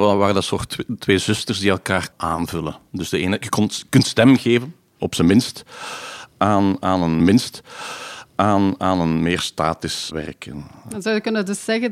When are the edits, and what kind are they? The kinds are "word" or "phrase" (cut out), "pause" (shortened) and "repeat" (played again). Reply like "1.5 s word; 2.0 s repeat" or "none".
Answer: 2.1 s word; 5.0 s word; 7.2 s repeat; 10.1 s word